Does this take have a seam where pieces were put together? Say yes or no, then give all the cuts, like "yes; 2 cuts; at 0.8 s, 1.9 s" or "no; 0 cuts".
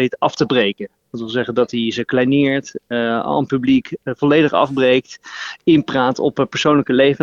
no; 0 cuts